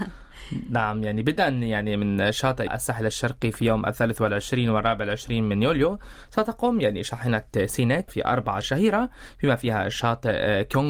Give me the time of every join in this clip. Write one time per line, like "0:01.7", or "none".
0:02.7
0:08.1
0:08.6